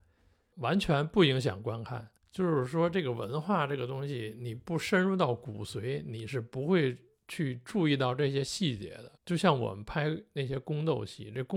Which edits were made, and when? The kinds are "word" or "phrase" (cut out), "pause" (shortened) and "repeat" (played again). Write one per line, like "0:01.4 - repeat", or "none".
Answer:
0:02.2 - pause
0:09.2 - pause